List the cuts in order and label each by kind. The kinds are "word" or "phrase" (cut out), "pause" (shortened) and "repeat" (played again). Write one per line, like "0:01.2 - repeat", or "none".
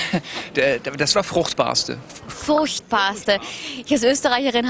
0:01.1 - word